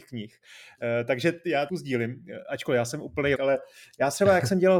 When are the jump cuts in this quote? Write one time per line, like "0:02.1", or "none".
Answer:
0:01.7
0:03.3